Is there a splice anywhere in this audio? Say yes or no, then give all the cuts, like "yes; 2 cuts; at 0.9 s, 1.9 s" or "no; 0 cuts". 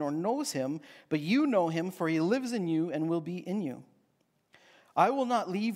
no; 0 cuts